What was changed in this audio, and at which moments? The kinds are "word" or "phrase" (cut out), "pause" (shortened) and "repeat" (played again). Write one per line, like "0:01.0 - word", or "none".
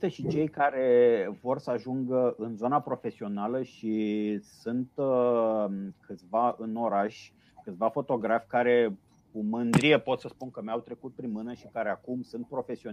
none